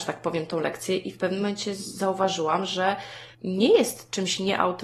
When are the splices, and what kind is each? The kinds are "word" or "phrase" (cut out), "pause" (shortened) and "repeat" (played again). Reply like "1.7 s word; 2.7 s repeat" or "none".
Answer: 3.3 s pause